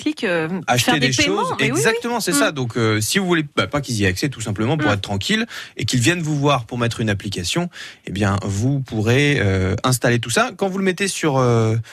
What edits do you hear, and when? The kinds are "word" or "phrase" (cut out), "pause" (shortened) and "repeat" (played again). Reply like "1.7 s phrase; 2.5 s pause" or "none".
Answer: 3.5 s pause

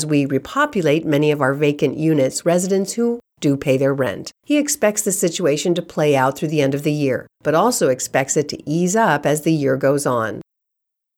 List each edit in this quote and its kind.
2.4 s word; 4.4 s pause; 7.3 s pause

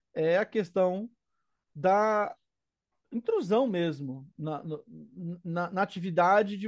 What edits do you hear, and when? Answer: none

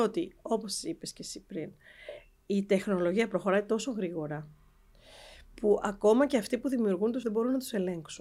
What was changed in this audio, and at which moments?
7.2 s word

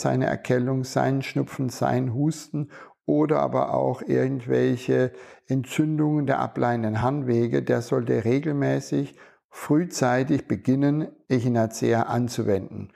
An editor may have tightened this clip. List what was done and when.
none

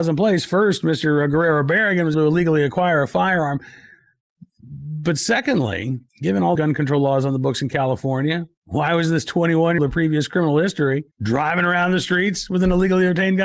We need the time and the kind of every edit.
2.1 s word; 6.1 s pause; 6.6 s word; 9.8 s word; 11.1 s pause

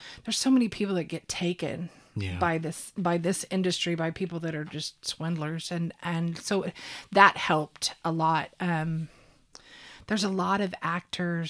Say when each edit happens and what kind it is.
none

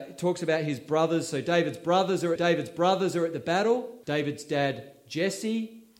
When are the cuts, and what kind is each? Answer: 2.4 s repeat; 4.0 s pause

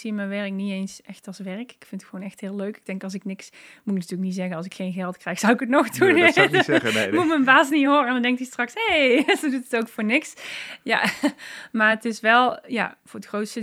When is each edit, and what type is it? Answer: none

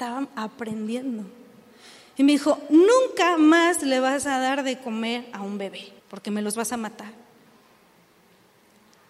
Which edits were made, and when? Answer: 6.0 s pause

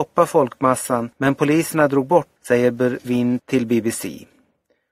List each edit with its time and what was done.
1.1 s pause; 2.4 s word; 3.0 s word; 3.4 s word

